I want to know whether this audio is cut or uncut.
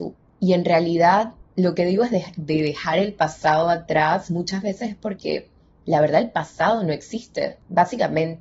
uncut